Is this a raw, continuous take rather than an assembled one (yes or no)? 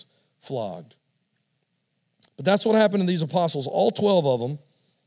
no